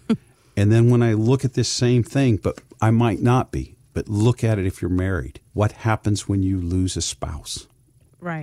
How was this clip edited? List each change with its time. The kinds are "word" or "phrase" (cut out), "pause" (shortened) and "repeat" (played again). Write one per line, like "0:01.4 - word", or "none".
0:05.5 - pause